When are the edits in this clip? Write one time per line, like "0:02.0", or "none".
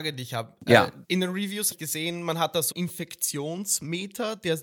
0:01.0
0:01.7
0:02.7